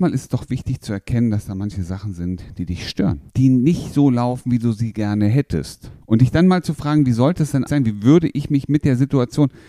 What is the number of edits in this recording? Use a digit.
3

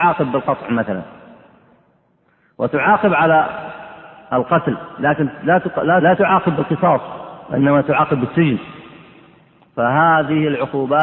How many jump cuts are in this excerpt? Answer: 1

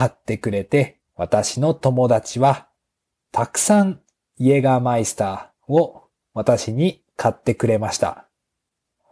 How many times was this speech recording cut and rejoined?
1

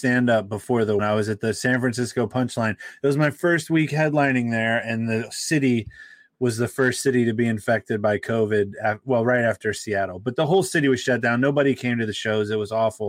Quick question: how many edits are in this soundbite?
1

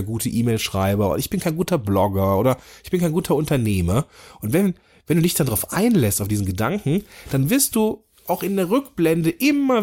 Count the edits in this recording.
0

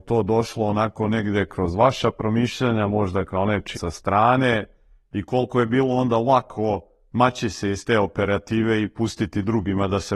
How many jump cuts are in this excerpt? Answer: 1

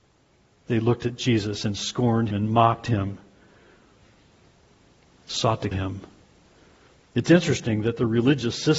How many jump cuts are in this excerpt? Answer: 2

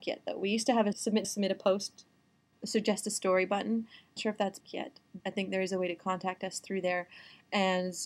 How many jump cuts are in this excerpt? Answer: 6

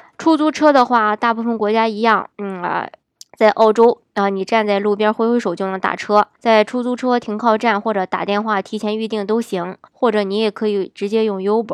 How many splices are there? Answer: 4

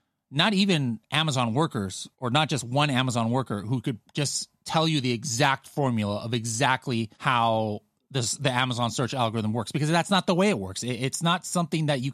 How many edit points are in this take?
2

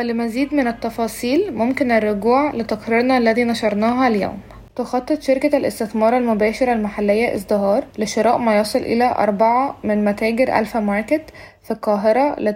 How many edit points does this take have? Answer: 2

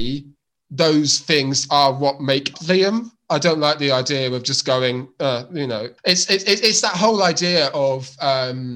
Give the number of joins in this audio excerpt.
2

